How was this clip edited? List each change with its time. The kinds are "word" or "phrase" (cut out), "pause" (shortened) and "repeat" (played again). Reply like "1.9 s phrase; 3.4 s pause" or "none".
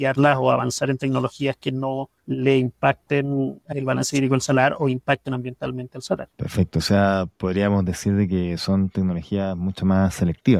2.2 s pause; 6.3 s pause